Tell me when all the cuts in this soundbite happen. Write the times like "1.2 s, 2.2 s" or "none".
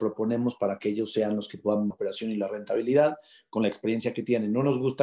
1.9 s